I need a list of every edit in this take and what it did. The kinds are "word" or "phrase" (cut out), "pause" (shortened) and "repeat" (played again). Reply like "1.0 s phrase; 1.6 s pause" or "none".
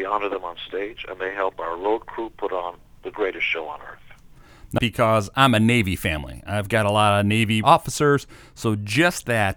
4.8 s phrase; 7.6 s word